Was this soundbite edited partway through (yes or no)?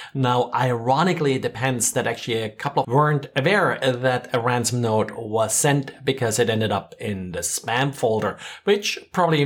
yes